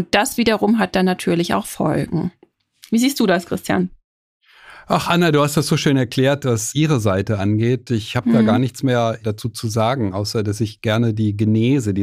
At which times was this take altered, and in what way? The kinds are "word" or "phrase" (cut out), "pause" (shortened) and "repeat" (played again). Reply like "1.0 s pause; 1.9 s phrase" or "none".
none